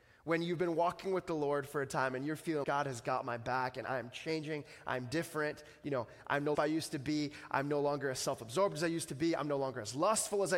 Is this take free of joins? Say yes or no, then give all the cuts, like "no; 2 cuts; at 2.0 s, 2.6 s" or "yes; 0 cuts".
no; 2 cuts; at 2.6 s, 6.5 s